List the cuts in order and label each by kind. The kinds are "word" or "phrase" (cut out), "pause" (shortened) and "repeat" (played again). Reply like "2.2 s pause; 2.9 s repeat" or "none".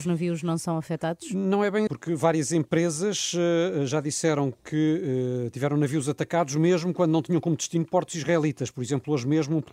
1.9 s word